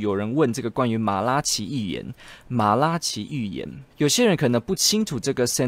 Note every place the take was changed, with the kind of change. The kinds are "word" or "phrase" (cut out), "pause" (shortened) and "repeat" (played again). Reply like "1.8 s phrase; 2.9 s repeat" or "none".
3.9 s pause